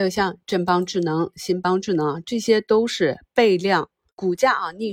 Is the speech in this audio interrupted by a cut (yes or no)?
no